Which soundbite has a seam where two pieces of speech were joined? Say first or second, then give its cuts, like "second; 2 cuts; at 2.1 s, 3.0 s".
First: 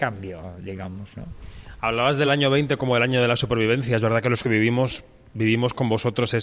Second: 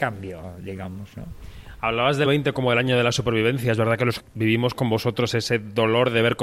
second; 2 cuts; at 2.2 s, 4.2 s